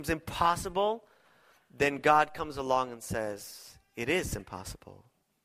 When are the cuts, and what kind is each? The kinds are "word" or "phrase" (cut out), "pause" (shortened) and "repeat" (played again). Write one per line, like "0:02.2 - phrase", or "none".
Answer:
none

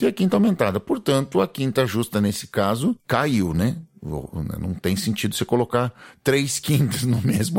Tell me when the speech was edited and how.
none

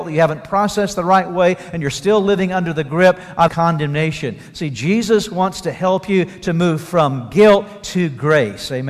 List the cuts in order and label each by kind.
0:03.5 - word

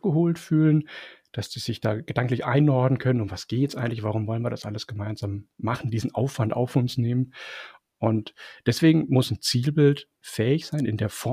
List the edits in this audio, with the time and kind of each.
none

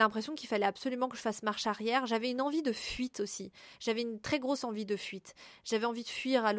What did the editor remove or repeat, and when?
none

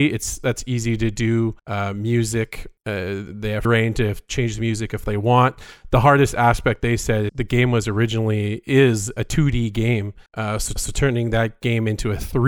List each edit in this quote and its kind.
0:01.6 - pause
0:02.8 - pause
0:03.6 - word
0:07.3 - word
0:10.3 - pause
0:10.8 - repeat

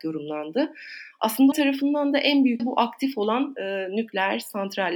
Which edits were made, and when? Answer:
0:01.5 - word
0:02.6 - word

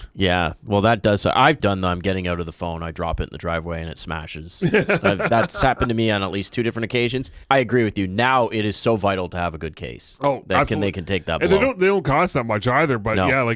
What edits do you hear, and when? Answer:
0:01.6 - word
0:07.4 - pause

